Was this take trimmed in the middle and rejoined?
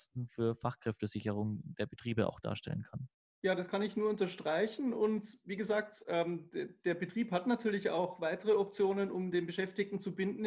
yes; 1 cut; at 3.2 s

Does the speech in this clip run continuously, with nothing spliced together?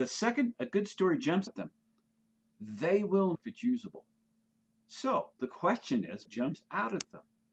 no; 3 cuts; at 1.5 s, 3.3 s, 6.2 s

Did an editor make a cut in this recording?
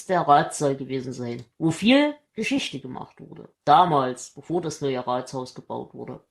yes; 2 cuts; at 1.5 s, 3.5 s

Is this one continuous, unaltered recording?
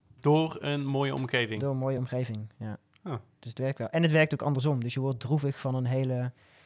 yes; 0 cuts

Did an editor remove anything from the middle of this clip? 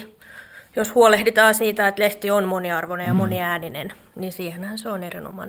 no; 0 cuts

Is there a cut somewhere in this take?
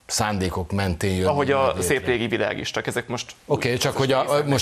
no; 0 cuts

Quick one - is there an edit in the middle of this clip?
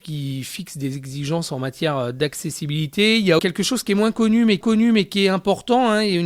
yes; 2 cuts; at 3.4 s, 4.6 s

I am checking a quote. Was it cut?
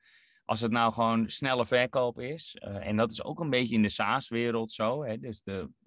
no; 0 cuts

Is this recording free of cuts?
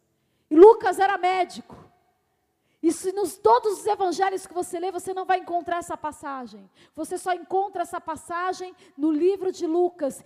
yes; 0 cuts

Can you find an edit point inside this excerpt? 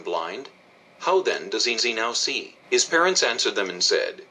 yes; 2 cuts; at 1.8 s, 2.6 s

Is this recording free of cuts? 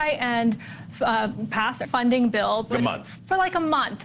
no; 2 cuts; at 1.8 s, 2.7 s

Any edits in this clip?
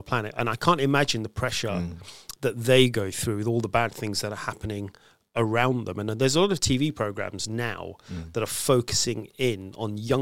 no; 0 cuts

